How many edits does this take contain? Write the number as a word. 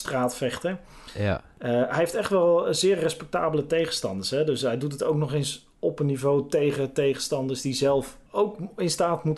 one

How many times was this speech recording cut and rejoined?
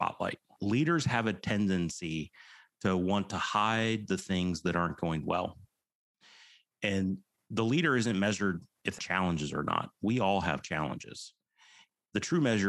one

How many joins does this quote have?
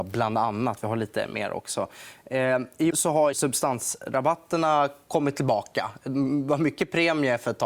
two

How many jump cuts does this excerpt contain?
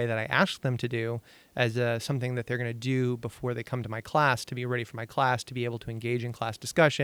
zero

